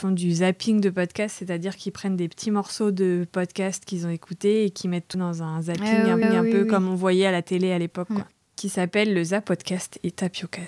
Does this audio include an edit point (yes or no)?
yes